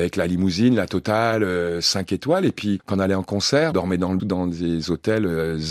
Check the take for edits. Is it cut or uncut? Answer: cut